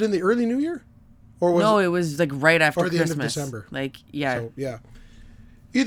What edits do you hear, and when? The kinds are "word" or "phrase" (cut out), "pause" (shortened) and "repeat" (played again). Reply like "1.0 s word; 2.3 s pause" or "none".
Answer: none